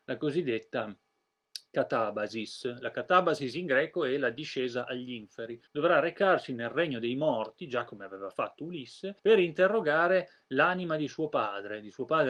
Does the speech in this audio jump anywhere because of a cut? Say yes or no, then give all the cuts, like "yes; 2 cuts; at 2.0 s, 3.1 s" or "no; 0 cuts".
yes; 2 cuts; at 5.7 s, 9.2 s